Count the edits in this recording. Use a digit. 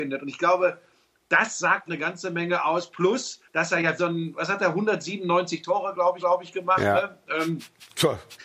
4